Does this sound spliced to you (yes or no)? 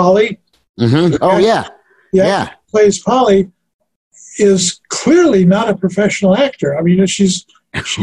no